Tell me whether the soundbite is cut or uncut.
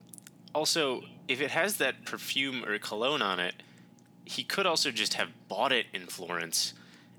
uncut